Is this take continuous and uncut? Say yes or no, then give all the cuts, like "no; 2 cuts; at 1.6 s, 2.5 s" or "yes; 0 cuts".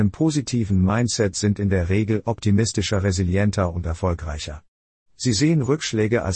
yes; 0 cuts